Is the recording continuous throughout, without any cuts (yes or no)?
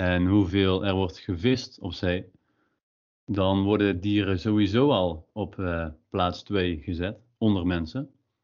yes